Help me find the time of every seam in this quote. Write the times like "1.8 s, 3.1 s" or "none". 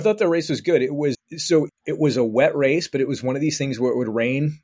1.1 s, 1.7 s